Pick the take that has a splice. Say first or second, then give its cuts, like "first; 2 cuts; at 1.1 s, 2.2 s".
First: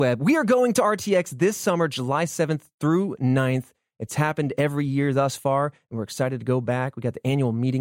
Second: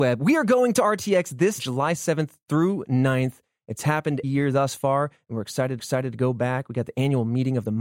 second; 3 cuts; at 1.6 s, 4.2 s, 5.8 s